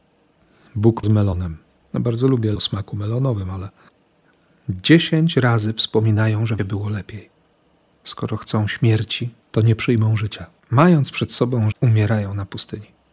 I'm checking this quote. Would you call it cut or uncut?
cut